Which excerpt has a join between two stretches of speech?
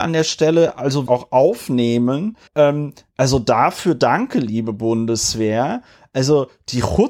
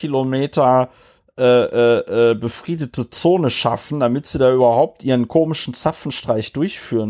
first; 2 cuts; at 1.1 s, 2.5 s

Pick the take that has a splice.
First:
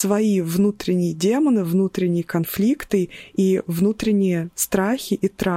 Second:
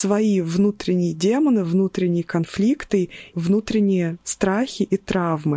second; 1 cut; at 3.3 s

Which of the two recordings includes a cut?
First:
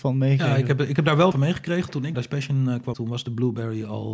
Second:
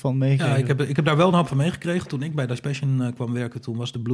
first; 3 cuts; at 1.3 s, 2.1 s, 2.9 s

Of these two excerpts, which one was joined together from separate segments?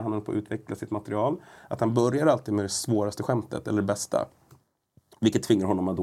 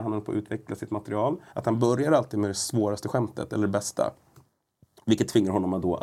second; 1 cut; at 1.5 s

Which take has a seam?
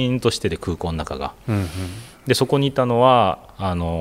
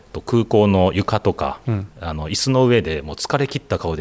second; 1 cut; at 1.9 s

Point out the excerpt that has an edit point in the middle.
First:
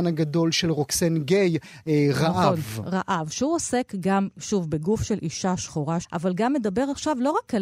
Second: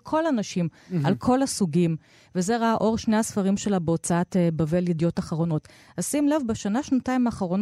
first; 1 cut; at 6.0 s

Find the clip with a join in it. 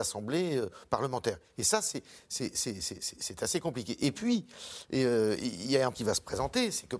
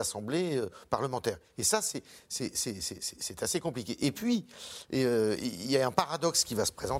first; 1 cut; at 5.9 s

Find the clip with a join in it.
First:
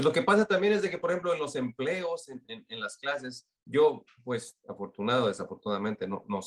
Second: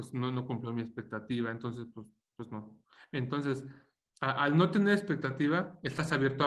first; 1 cut; at 3.6 s

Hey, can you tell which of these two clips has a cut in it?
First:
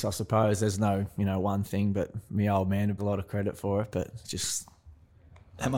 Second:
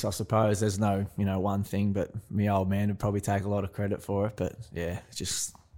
first; 2 cuts; at 3.0 s, 4.2 s

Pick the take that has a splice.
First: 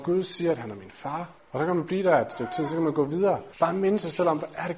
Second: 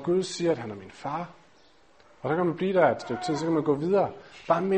first; 2 cuts; at 1.4 s, 3.5 s

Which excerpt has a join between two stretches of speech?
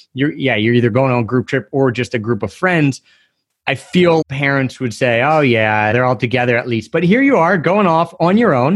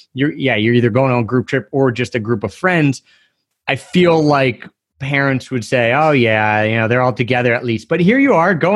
first; 2 cuts; at 4.2 s, 5.9 s

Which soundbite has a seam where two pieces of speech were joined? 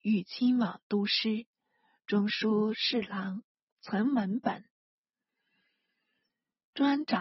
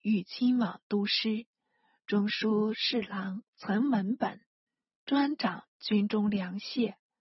second; 2 cuts; at 3.5 s, 4.7 s

